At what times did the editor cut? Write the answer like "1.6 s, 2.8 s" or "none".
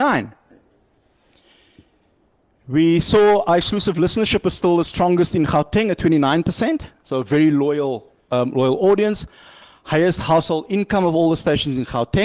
none